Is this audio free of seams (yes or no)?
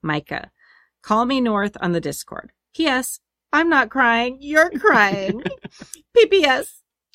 yes